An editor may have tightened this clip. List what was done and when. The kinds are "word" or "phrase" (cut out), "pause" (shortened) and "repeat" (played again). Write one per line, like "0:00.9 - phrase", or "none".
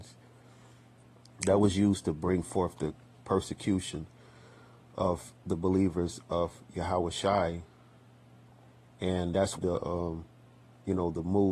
0:09.6 - phrase